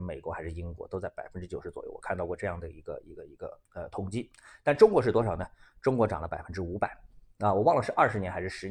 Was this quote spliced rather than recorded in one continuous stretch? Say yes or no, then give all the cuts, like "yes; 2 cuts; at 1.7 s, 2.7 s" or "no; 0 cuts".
yes; 1 cut; at 3.7 s